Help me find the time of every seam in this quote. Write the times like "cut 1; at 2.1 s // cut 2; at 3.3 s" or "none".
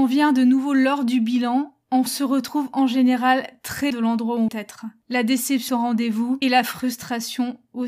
cut 1; at 2.1 s // cut 2; at 3.9 s // cut 3; at 4.5 s // cut 4; at 5.7 s // cut 5; at 6.4 s